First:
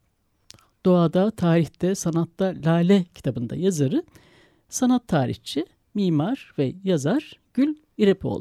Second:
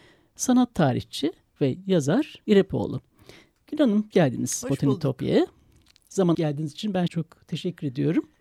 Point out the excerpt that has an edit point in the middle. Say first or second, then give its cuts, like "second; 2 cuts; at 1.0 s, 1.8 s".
second; 5 cuts; at 1.6 s, 2.4 s, 4.1 s, 6.3 s, 7.1 s